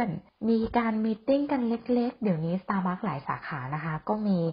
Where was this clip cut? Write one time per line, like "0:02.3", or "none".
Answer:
none